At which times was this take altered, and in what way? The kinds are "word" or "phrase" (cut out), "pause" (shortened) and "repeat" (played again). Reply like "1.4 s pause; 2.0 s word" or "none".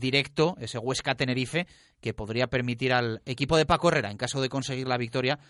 none